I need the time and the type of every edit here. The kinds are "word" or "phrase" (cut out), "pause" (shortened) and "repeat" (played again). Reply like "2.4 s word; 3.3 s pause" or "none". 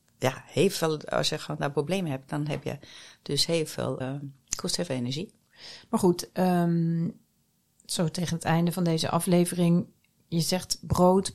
4.0 s word

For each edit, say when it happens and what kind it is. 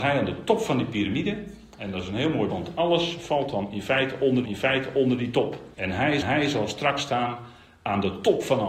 2.5 s word; 4.4 s repeat; 5.7 s pause; 6.2 s repeat

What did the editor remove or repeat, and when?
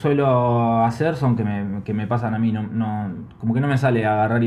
1.4 s word

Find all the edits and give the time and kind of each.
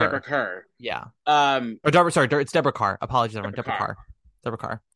none

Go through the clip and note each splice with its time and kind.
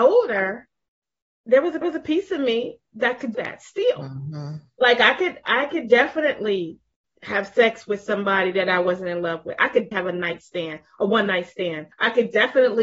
1.8 s repeat; 3.3 s word; 9.9 s word; 11.9 s pause

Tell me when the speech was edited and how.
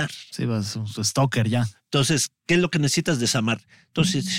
none

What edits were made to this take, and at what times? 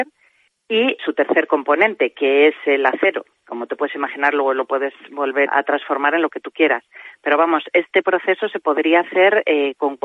1.0 s word; 3.4 s word; 5.5 s word

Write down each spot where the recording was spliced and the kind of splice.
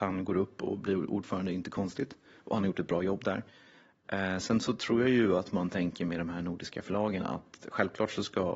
none

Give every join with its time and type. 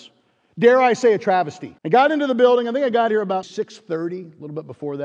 1.8 s pause; 3.4 s word

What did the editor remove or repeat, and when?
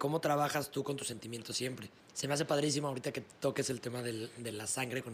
2.0 s pause

